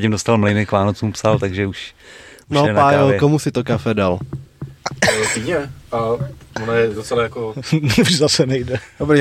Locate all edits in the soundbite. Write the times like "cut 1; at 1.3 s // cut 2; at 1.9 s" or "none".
none